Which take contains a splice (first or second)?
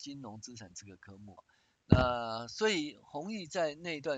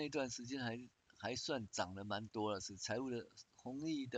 first